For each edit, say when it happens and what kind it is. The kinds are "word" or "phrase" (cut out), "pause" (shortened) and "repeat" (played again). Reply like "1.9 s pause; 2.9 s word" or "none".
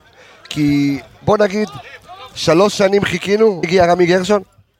3.6 s word